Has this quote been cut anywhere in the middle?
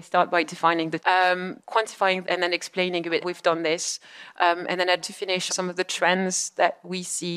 yes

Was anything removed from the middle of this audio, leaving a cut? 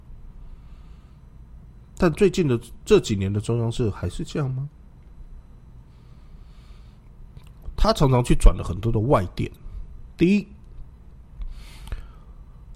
no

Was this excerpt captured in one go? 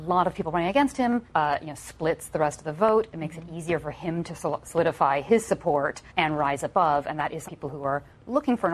no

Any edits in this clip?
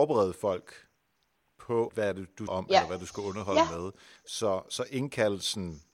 yes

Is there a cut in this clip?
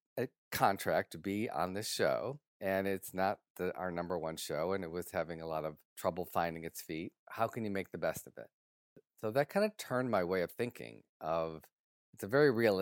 yes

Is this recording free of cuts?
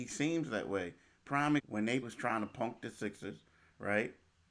no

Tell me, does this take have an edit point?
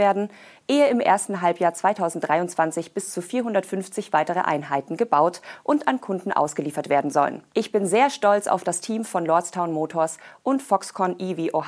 yes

